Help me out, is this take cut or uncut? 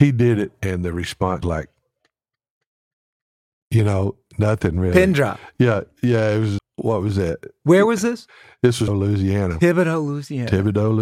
cut